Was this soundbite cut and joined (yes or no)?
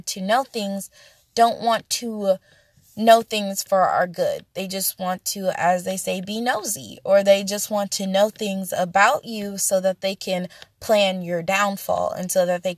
no